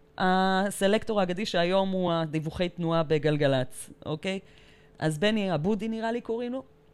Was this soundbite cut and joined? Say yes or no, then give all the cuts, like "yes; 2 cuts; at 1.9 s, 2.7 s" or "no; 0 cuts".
no; 0 cuts